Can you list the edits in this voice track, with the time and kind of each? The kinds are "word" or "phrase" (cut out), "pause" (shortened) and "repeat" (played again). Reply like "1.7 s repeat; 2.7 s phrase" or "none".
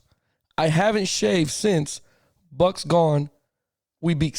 none